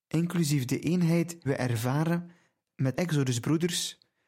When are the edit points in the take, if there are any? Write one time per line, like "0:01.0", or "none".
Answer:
0:01.5
0:02.9